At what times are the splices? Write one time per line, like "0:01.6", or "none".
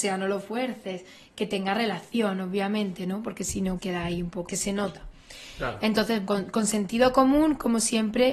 0:03.8
0:04.5
0:06.3

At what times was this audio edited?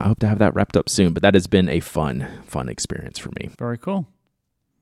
0:03.5

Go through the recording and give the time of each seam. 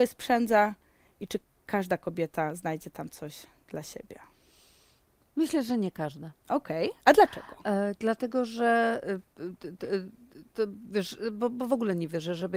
none

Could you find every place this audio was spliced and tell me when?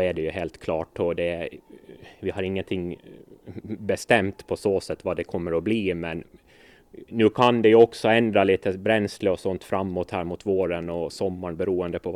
none

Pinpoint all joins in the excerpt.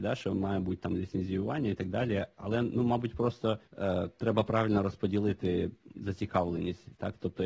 0:03.7

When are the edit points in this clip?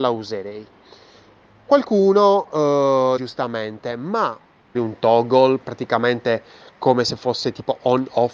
0:03.2
0:04.7

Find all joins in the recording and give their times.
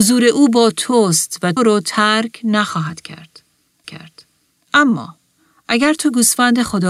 0:01.6
0:03.8

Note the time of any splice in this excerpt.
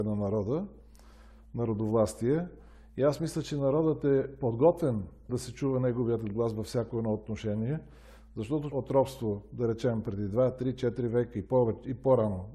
0:05.3
0:08.7

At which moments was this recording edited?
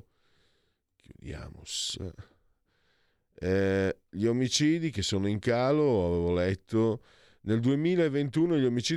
none

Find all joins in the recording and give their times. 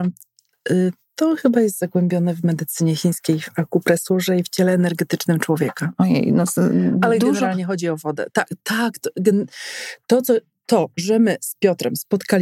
none

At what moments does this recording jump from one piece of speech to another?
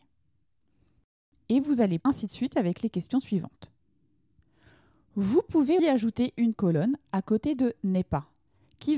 0:02.0
0:05.8
0:06.5

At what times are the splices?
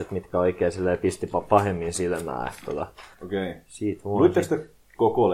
0:03.1

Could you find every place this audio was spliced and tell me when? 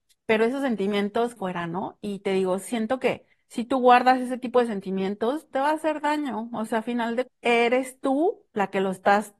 0:01.4
0:03.3
0:05.5
0:07.3

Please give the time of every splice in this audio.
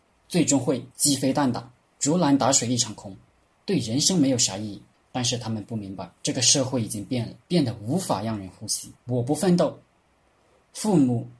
0:00.9
0:01.8
0:04.9
0:06.2
0:07.4
0:09.0

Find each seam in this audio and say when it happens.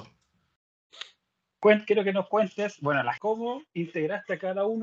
0:03.2

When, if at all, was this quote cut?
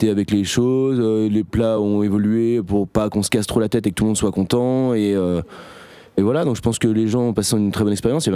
none

